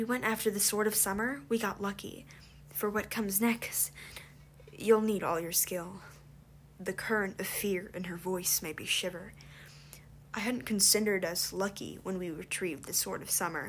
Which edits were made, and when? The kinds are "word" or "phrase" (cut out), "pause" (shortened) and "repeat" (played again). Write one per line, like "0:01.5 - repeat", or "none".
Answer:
none

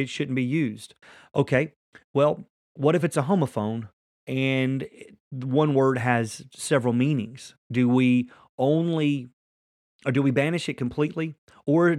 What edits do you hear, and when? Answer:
none

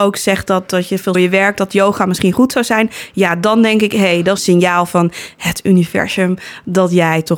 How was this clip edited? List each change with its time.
0:01.1 - phrase
0:04.4 - phrase

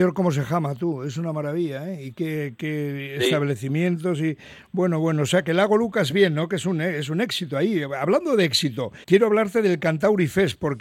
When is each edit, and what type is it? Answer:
0:09.0 - pause

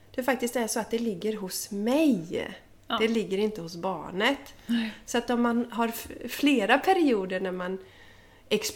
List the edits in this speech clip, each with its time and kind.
none

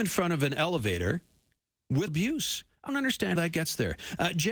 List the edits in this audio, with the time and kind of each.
0:02.1 - word
0:02.9 - word
0:03.4 - word

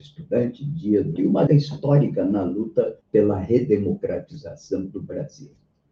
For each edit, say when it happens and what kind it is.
0:01.2 - word
0:01.5 - word
0:03.0 - pause

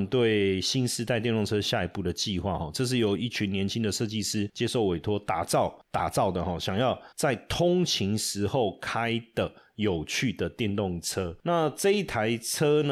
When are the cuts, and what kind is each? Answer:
0:07.1 - pause

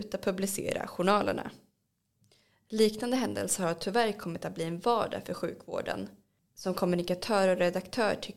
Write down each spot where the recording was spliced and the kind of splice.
none

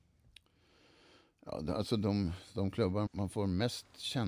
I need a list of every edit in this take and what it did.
0:03.1 - word

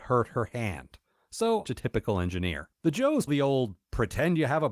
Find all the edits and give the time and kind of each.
0:01.6 - phrase
0:02.7 - pause
0:03.3 - word

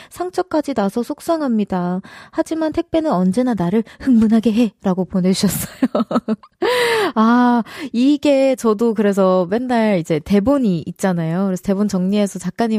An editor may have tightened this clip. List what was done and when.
none

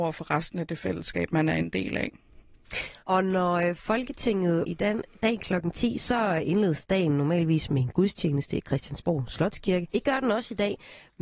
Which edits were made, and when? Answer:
0:03.0 - pause
0:04.6 - word
0:09.9 - pause

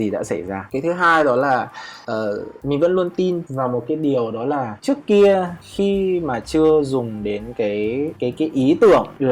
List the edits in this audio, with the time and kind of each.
none

